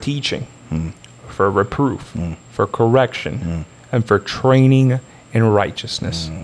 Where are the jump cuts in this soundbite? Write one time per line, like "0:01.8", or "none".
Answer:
0:02.4